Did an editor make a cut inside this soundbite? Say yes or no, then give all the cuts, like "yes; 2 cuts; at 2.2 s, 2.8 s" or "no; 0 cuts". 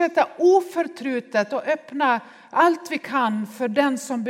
no; 0 cuts